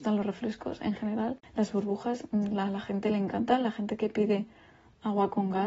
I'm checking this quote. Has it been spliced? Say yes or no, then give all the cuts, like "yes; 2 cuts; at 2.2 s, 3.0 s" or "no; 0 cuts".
no; 0 cuts